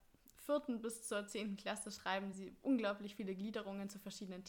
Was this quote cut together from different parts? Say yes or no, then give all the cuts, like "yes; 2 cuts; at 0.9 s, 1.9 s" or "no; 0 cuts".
no; 0 cuts